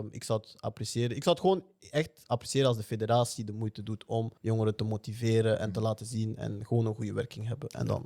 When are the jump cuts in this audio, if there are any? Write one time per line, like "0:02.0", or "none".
0:04.4